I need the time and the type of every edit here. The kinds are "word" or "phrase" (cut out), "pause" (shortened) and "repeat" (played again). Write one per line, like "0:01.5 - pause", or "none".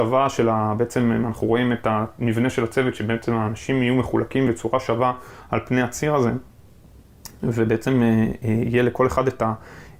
none